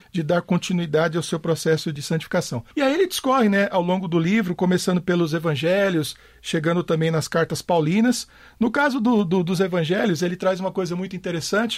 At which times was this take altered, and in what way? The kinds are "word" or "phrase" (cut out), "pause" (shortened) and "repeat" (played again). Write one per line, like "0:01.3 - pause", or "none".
0:02.7 - pause